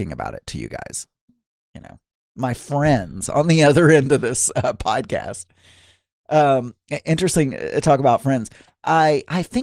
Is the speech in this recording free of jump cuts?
yes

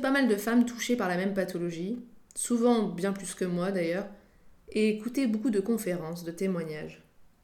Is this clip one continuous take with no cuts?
no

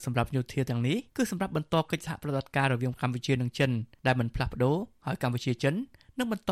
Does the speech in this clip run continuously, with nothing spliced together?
no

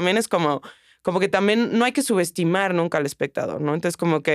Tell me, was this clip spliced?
no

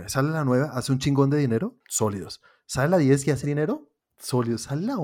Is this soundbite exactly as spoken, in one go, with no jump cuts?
no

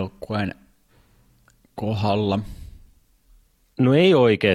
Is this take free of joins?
yes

